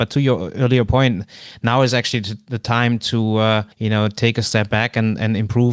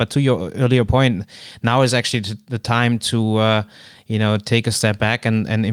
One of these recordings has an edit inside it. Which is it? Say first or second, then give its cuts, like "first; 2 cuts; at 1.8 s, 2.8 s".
first; 1 cut; at 3.7 s